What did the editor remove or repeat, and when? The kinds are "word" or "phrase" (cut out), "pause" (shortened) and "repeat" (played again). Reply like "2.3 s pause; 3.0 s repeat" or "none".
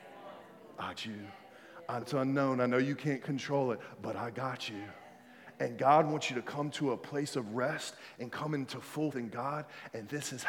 1.0 s word; 2.0 s word; 9.1 s word